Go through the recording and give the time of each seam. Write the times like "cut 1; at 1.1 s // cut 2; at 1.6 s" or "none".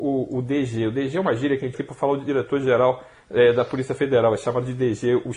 cut 1; at 1.7 s